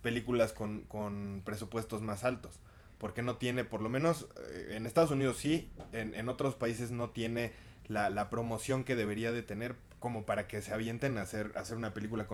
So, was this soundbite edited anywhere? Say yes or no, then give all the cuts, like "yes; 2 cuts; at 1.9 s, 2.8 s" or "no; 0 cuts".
no; 0 cuts